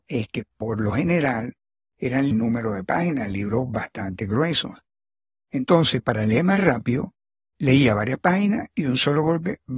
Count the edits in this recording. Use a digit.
1